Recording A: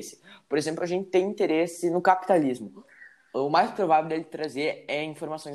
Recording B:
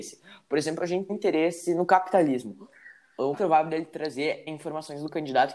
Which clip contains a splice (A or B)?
B